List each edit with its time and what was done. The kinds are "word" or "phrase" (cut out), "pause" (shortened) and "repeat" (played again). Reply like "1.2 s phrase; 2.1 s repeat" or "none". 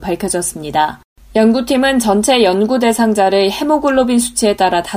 none